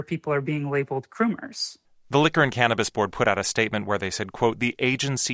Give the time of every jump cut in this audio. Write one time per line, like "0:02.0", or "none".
0:01.8